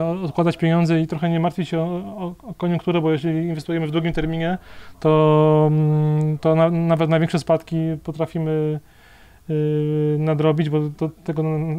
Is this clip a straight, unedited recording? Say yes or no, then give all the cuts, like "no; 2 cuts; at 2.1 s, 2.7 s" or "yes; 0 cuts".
yes; 0 cuts